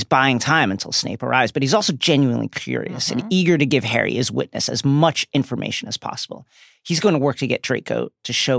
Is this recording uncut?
yes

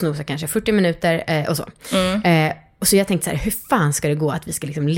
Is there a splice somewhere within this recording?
no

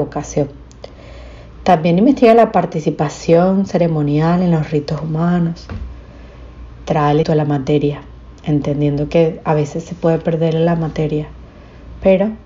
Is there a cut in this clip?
yes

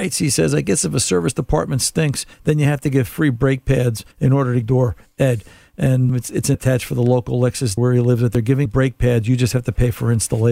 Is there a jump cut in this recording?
yes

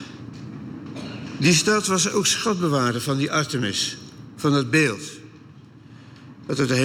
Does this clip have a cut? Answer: no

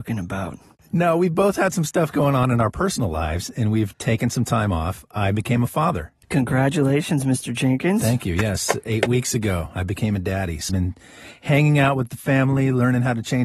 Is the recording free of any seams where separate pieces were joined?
no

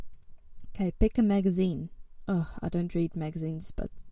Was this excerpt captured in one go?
yes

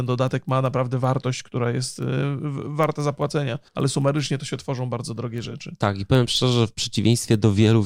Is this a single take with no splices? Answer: no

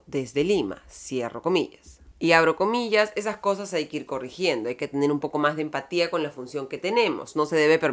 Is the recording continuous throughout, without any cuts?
yes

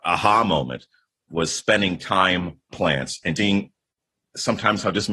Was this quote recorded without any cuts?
no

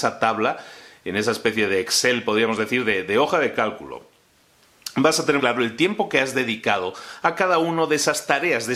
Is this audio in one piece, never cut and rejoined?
no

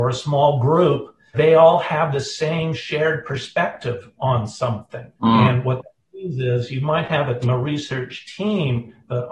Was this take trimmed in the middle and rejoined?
yes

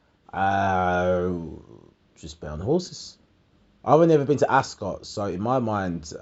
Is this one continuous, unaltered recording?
no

